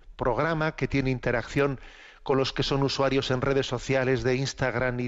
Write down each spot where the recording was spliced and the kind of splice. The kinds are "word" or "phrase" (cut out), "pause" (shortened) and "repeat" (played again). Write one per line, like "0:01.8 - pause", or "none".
none